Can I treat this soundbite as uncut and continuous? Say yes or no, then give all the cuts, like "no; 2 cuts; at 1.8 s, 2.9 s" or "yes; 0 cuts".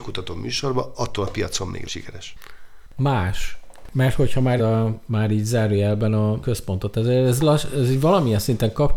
no; 3 cuts; at 1.9 s, 4.6 s, 6.4 s